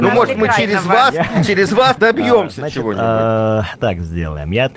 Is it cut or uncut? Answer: cut